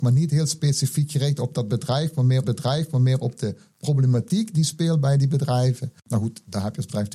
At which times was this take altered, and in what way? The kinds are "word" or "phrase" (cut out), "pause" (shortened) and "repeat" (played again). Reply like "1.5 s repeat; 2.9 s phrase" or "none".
2.4 s repeat